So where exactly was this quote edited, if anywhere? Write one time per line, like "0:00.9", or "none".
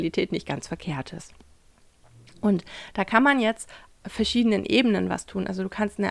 0:04.0

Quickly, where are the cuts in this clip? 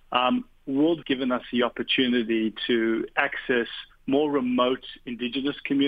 0:01.0
0:03.9

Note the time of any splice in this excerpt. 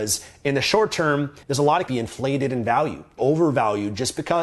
0:01.4
0:01.9
0:03.2

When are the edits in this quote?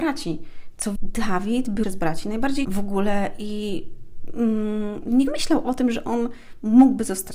0:01.0
0:01.8
0:02.6
0:05.3

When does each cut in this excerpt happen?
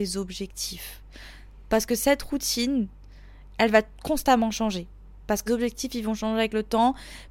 0:05.5

